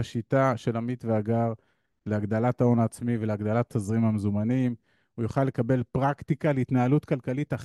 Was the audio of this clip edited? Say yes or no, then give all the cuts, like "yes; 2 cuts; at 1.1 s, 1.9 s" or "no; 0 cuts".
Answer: no; 0 cuts